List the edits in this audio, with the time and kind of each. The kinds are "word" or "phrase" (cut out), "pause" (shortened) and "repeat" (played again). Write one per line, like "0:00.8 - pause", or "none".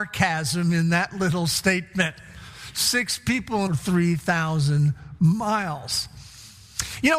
0:03.7 - phrase